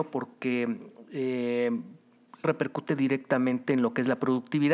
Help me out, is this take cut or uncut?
cut